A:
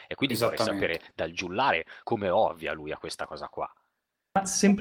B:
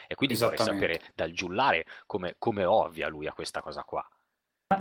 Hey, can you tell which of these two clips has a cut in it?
A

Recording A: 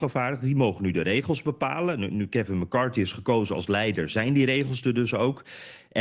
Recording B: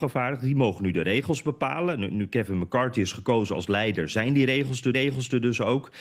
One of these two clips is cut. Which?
B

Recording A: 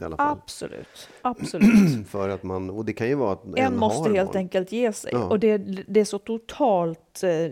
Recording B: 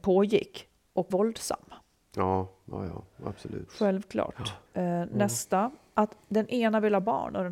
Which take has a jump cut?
B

